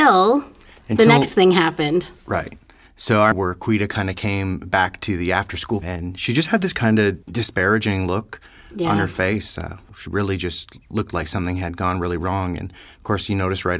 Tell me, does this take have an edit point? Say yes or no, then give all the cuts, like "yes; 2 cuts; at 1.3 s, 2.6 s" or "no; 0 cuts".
yes; 3 cuts; at 3.3 s, 5.8 s, 7.2 s